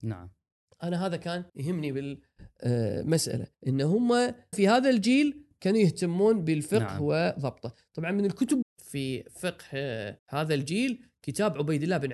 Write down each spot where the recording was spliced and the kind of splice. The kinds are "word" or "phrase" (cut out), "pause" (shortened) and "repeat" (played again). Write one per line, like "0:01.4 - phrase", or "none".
0:01.5 - pause
0:03.5 - pause
0:04.5 - word
0:08.6 - phrase
0:10.2 - pause